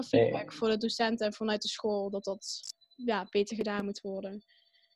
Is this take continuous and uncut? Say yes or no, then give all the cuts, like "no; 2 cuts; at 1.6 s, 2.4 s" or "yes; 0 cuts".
no; 1 cut; at 2.8 s